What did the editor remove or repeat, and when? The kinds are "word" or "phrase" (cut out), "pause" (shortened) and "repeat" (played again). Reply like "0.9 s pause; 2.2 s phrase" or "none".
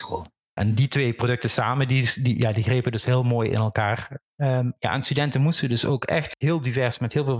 none